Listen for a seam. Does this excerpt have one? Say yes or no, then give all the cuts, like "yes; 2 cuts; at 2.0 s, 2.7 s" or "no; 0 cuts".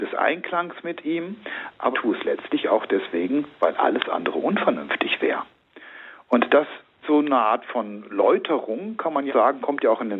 yes; 3 cuts; at 1.9 s, 7.0 s, 9.3 s